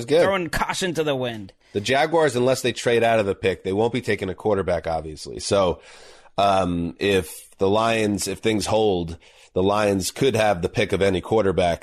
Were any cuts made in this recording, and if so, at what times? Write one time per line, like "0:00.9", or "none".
none